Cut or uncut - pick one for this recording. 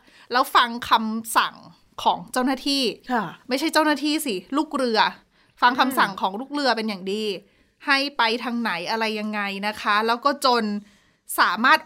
uncut